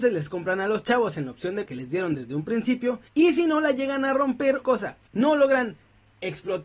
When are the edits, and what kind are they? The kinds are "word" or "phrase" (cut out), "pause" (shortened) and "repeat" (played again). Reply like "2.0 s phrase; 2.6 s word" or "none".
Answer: 1.7 s word; 3.1 s pause; 4.6 s phrase; 5.1 s pause